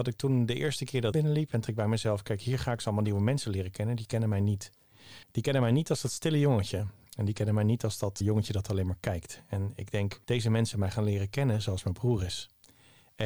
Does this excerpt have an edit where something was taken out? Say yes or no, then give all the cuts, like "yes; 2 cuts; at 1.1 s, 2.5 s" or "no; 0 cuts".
yes; 7 cuts; at 1.1 s, 1.7 s, 2.8 s, 5.2 s, 8.2 s, 10.2 s, 10.7 s